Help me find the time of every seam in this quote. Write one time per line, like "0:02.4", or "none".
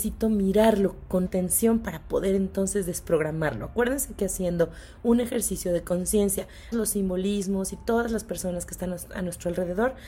0:01.3
0:06.7